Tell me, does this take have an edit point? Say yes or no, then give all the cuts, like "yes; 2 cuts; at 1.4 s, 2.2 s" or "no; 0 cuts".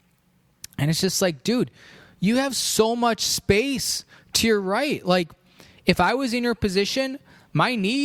no; 0 cuts